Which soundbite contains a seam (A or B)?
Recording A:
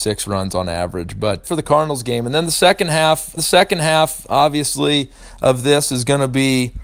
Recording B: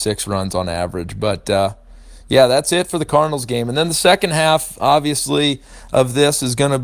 A